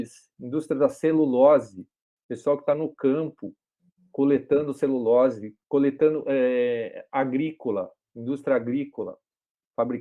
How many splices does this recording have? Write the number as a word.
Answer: one